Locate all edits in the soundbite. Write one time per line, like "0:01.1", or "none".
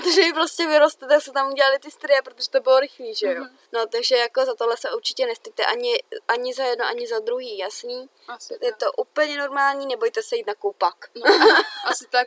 0:03.7